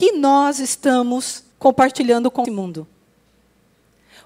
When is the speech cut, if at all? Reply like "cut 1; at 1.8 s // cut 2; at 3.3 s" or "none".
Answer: cut 1; at 1.5 s // cut 2; at 2.4 s